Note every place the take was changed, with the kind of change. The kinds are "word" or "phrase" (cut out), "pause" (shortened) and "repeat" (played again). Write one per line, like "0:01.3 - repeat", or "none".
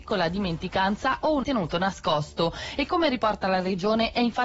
0:01.4 - word